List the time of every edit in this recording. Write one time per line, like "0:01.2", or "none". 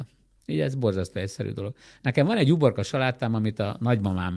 none